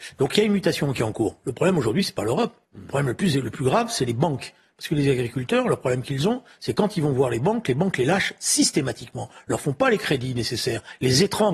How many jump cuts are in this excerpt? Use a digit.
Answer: 1